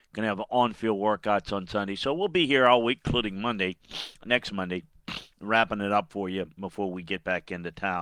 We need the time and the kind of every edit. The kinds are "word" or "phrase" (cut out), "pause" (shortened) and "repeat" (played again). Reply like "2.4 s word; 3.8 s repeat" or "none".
4.1 s pause

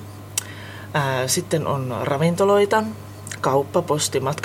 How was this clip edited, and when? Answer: none

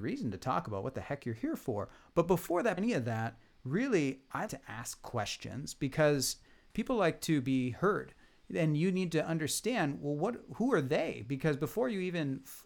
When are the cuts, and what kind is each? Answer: 2.8 s word; 4.5 s word; 6.7 s word

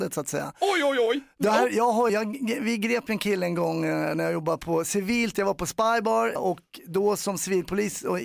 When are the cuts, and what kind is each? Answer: 2.1 s word; 6.4 s word

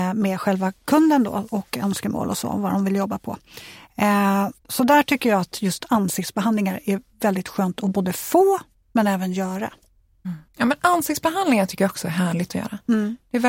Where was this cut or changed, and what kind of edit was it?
4.6 s pause; 8.7 s pause; 10.5 s pause

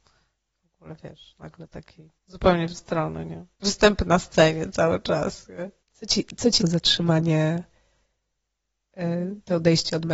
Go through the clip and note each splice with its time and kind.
2.2 s pause; 2.7 s word; 3.5 s pause; 5.8 s pause; 6.6 s word

